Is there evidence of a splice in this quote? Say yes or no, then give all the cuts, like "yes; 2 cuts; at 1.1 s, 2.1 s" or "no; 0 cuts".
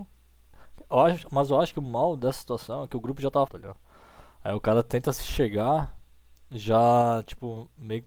yes; 1 cut; at 3.5 s